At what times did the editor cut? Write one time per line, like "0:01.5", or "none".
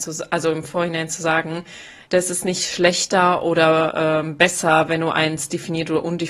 0:02.0